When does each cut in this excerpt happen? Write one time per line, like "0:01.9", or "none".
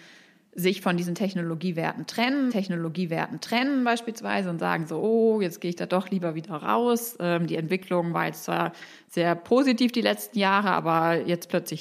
0:02.5